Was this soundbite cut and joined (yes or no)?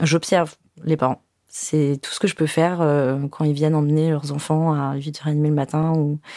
no